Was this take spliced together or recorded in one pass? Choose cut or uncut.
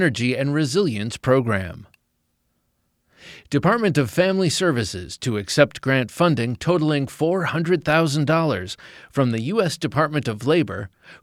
uncut